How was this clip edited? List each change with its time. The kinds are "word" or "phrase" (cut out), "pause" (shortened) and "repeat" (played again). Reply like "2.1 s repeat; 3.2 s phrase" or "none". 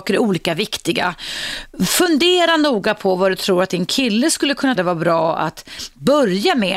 4.8 s word